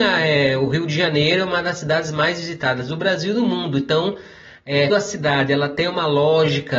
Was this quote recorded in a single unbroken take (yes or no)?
no